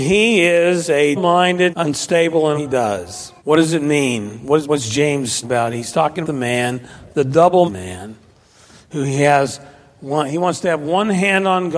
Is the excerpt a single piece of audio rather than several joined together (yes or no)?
no